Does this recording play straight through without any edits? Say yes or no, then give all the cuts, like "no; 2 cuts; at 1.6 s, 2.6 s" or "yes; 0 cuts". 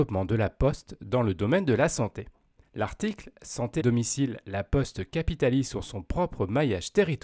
no; 2 cuts; at 2.6 s, 3.8 s